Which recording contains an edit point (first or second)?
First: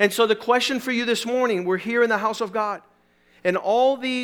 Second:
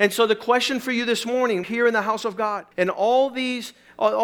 second